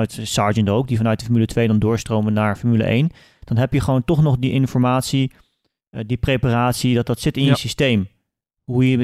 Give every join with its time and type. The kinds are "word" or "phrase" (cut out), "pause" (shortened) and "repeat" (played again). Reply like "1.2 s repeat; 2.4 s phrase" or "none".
none